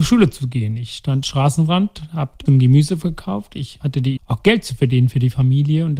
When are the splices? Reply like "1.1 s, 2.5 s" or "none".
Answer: 1.2 s, 2.5 s, 3.8 s, 4.2 s

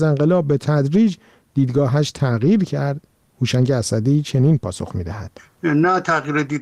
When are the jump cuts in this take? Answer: none

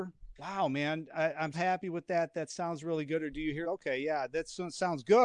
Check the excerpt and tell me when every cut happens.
1.5 s, 3.6 s

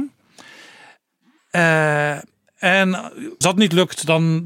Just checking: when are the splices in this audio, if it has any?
3.4 s

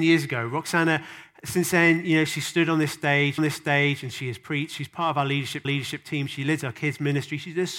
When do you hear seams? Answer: 3.4 s, 5.6 s

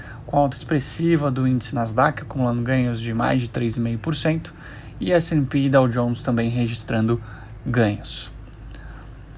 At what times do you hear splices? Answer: none

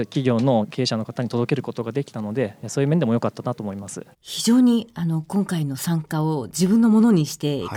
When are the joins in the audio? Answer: 4.1 s

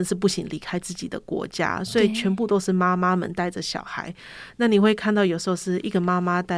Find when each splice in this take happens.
none

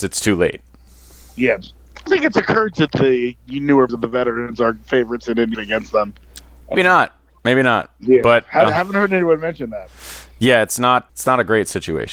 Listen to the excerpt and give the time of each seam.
2.1 s, 2.9 s, 3.9 s, 5.5 s, 6.7 s, 8.7 s, 11.1 s

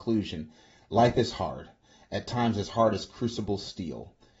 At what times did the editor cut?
none

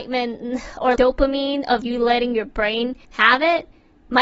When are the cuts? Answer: 1.0 s, 1.8 s, 3.0 s

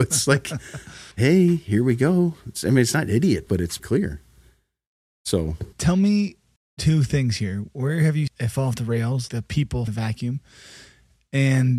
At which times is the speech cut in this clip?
1.1 s, 3.5 s, 3.8 s, 5.7 s, 6.6 s, 8.3 s, 9.3 s, 9.9 s

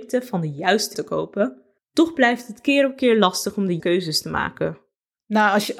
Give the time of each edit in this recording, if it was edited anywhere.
0.9 s, 1.8 s, 3.8 s

